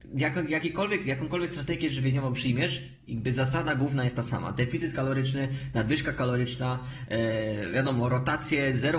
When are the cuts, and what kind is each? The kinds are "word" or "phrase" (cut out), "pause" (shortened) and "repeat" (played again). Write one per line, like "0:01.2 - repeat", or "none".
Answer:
none

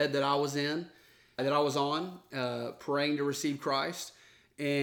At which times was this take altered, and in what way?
0:01.4 - word

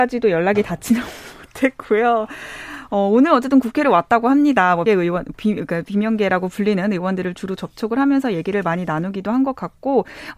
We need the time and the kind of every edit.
0:04.9 - word

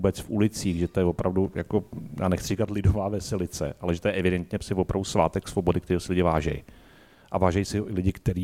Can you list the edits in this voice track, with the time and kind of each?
none

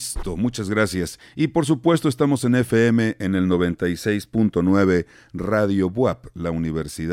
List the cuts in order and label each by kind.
none

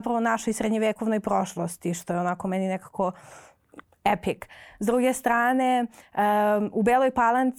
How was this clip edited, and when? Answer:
none

